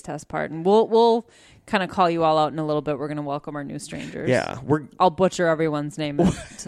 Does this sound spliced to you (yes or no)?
no